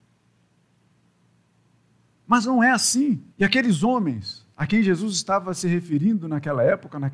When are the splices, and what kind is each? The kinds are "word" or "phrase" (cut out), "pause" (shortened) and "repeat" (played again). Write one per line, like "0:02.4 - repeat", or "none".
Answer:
0:03.3 - pause
0:04.5 - pause